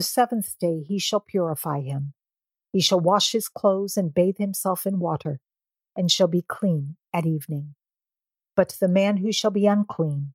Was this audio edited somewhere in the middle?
no; 0 cuts

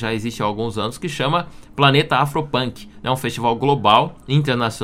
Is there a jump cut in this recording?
no; 0 cuts

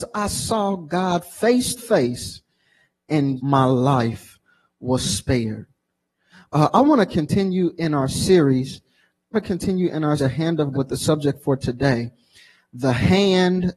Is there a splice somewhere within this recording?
yes; 5 cuts; at 1.8 s, 3.4 s, 9.3 s, 10.2 s, 10.7 s

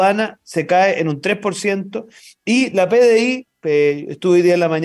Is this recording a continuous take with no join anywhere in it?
yes; 0 cuts

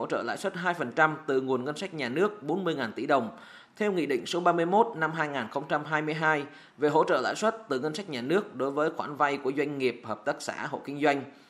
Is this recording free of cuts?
yes; 0 cuts

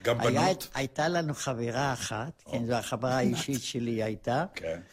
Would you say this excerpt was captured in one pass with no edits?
yes; 0 cuts

